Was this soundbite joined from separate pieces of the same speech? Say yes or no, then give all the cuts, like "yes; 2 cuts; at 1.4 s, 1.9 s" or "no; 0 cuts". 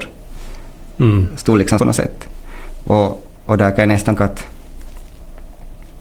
yes; 2 cuts; at 1.8 s, 4.2 s